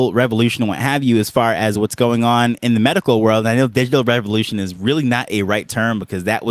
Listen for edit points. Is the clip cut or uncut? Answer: uncut